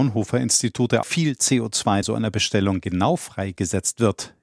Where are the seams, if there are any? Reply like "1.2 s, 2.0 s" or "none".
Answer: 1.0 s, 2.0 s